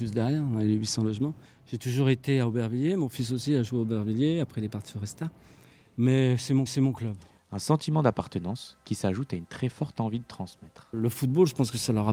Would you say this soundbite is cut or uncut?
cut